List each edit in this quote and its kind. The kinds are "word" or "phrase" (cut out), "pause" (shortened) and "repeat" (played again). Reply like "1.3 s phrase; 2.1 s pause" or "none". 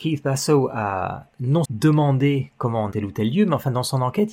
1.6 s word; 2.9 s word